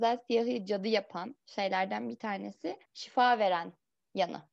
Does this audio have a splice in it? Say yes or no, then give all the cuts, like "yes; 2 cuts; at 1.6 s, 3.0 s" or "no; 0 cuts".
yes; 2 cuts; at 1.4 s, 2.9 s